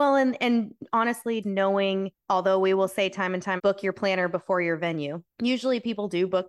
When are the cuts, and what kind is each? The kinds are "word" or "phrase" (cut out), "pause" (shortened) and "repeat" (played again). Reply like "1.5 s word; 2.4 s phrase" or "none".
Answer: 1.4 s word; 3.6 s word